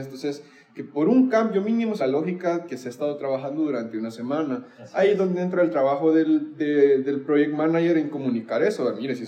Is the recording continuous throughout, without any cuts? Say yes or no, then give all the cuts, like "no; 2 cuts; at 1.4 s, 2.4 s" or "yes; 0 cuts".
no; 1 cut; at 2.0 s